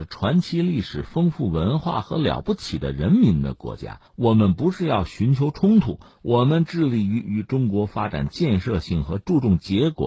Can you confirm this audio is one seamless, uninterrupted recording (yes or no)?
no